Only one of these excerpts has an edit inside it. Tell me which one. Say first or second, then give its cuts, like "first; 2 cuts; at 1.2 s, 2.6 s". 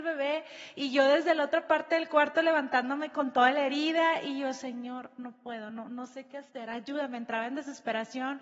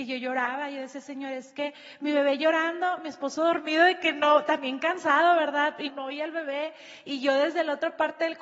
second; 1 cut; at 5.9 s